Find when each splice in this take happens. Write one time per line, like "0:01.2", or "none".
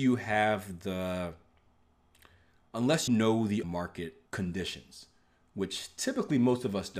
0:03.1
0:03.6
0:04.3

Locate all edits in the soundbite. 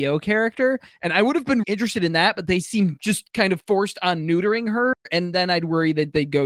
0:01.6

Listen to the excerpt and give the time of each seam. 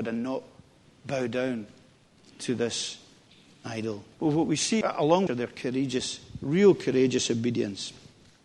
0:04.1
0:04.8
0:05.3

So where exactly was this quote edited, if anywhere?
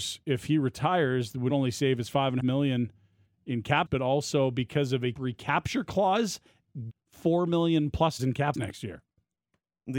0:01.5
0:02.4
0:03.9
0:05.1
0:06.9
0:08.2
0:08.5

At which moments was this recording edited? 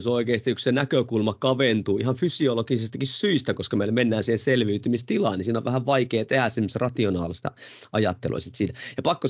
none

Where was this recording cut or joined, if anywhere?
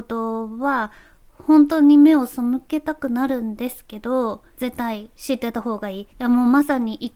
0:06.1

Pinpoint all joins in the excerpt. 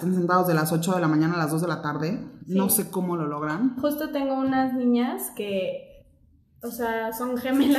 none

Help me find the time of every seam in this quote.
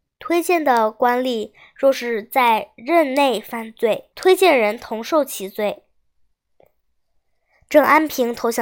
0:04.1

